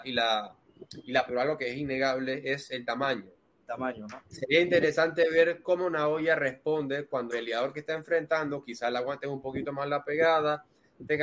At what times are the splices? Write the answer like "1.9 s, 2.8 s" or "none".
1.3 s, 7.3 s